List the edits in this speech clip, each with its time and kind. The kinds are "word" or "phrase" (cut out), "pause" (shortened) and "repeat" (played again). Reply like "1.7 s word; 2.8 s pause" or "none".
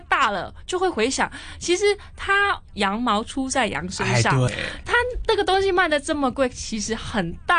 4.5 s word